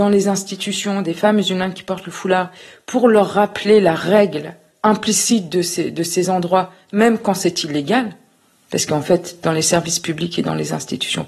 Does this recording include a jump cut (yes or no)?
no